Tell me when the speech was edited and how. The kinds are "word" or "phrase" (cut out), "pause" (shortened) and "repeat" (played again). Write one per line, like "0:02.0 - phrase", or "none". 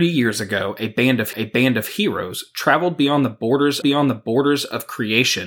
0:01.3 - repeat
0:03.8 - repeat